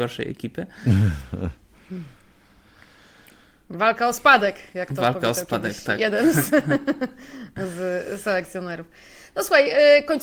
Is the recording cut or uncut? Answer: uncut